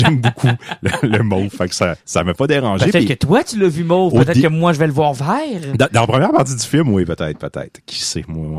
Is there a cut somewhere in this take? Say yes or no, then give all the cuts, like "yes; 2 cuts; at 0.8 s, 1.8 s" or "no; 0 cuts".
yes; 1 cut; at 2.0 s